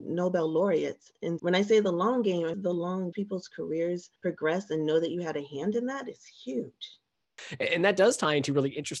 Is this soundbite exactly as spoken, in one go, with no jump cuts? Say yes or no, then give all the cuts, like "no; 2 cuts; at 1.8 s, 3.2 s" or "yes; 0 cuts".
no; 4 cuts; at 1.4 s, 2.5 s, 3.1 s, 4.2 s